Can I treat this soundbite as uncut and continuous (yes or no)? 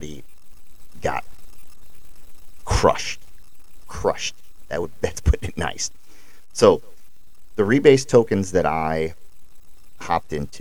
yes